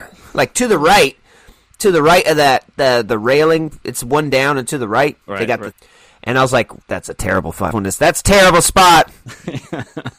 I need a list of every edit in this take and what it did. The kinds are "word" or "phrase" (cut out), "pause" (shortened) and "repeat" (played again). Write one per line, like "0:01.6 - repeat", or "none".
0:05.2 - pause
0:05.7 - phrase
0:06.8 - pause
0:07.7 - phrase